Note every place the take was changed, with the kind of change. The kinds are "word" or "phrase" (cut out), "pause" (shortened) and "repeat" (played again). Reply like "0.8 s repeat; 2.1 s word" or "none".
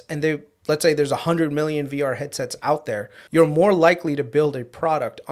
3.3 s pause